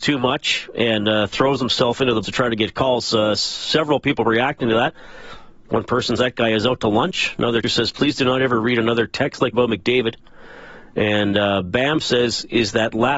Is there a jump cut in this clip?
yes; 4 cuts; at 2.2 s, 6.2 s, 7.6 s, 9.5 s

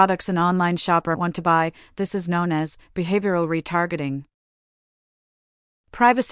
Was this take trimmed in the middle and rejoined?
yes; 1 cut; at 1.1 s

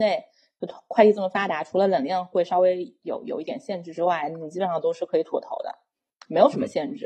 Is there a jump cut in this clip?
no; 0 cuts

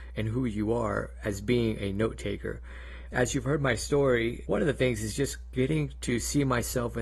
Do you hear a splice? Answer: no; 0 cuts

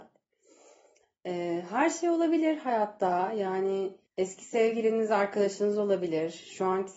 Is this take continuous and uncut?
no; 1 cut; at 4.1 s

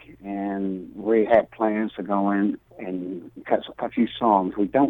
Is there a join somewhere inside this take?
yes; 1 cut; at 2.7 s

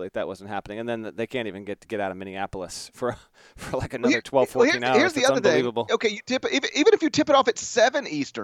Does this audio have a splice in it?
no; 0 cuts

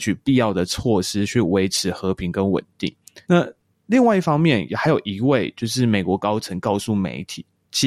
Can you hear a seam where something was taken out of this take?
yes; 1 cut; at 3.2 s

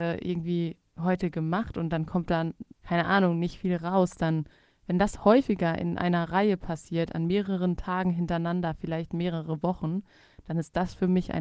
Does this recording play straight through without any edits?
no; 1 cut; at 2.7 s

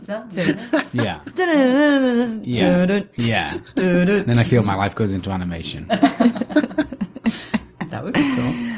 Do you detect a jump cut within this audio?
no; 0 cuts

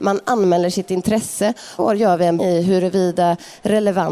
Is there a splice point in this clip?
yes; 2 cuts; at 1.8 s, 2.4 s

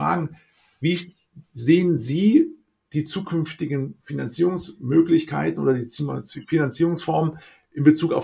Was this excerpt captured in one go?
yes; 0 cuts

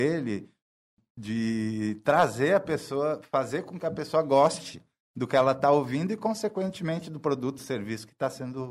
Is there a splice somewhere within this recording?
no; 0 cuts

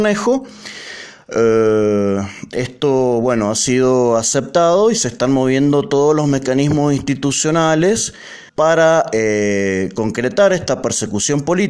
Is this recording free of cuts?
no; 1 cut; at 8.5 s

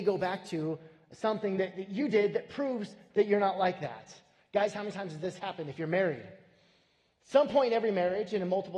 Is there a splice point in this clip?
no; 0 cuts

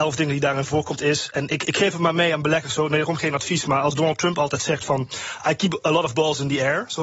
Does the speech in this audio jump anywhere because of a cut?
no; 0 cuts

